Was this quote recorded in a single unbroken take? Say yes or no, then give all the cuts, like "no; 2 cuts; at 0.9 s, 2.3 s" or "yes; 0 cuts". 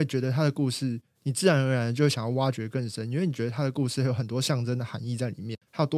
yes; 0 cuts